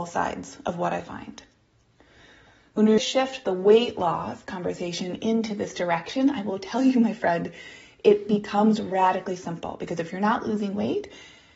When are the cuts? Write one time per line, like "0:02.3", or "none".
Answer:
0:03.0